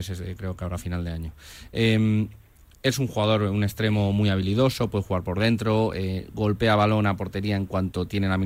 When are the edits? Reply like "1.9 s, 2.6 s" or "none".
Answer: none

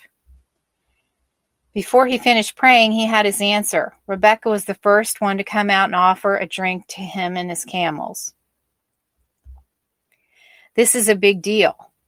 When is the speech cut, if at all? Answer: none

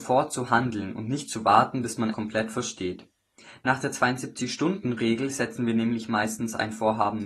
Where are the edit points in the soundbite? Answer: 2.1 s

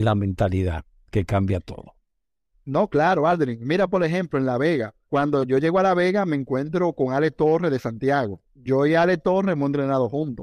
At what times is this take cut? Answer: 5.0 s, 8.4 s

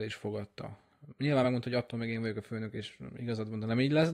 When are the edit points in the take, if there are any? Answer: none

